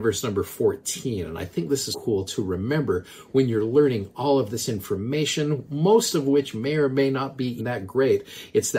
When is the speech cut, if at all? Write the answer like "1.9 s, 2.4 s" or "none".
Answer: 1.9 s, 7.6 s